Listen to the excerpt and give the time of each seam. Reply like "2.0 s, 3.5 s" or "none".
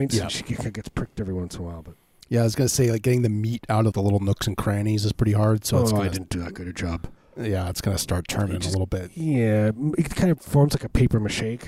3.9 s, 5.1 s